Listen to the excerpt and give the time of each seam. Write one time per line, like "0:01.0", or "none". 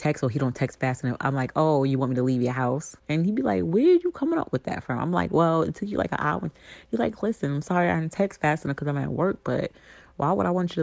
0:03.0